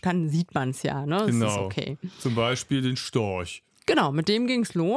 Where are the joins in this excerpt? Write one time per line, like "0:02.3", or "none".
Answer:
none